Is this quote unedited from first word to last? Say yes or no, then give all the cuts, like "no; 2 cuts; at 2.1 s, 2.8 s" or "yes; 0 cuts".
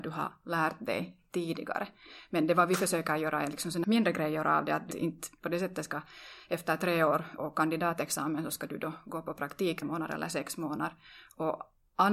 no; 4 cuts; at 3.8 s, 4.9 s, 7.4 s, 9.8 s